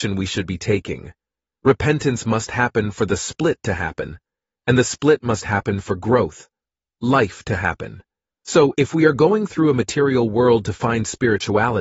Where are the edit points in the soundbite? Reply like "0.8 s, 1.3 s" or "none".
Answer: none